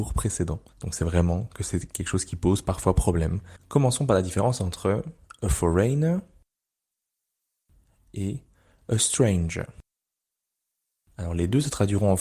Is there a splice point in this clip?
no; 0 cuts

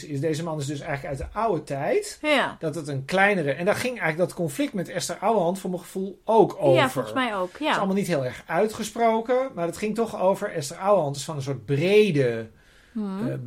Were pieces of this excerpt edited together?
no; 0 cuts

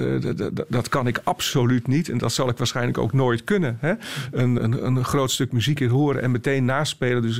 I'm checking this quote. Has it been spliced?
yes; 2 cuts; at 4.6 s, 5.8 s

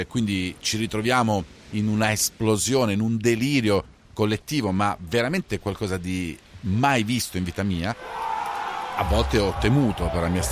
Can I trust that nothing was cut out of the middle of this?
yes; 0 cuts

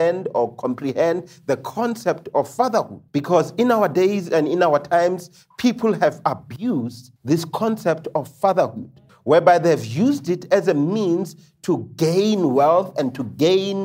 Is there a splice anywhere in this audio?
yes; 3 cuts; at 3.1 s, 7.2 s, 9.1 s

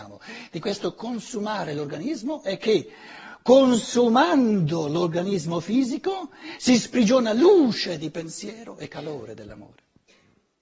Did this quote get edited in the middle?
no; 0 cuts

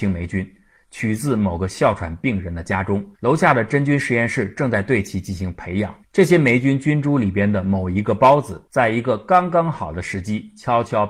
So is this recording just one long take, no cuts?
no; 3 cuts; at 3.1 s, 6.0 s, 8.7 s

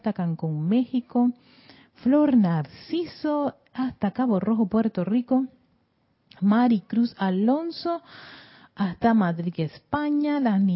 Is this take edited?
no; 0 cuts

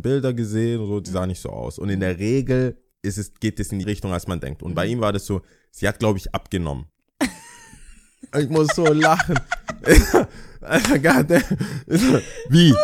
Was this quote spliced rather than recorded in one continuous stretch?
yes; 1 cut; at 3.8 s

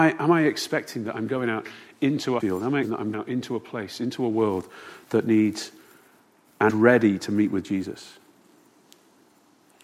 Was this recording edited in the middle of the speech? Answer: yes; 4 cuts; at 2.4 s, 2.8 s, 3.1 s, 6.7 s

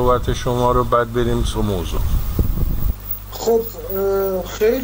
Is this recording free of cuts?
no; 1 cut; at 1.5 s

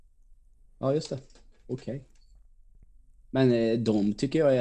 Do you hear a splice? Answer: no; 0 cuts

